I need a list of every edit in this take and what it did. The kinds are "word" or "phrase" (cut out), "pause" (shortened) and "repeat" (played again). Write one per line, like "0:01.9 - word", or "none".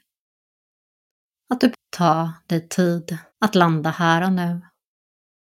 0:01.7 - word
0:03.3 - pause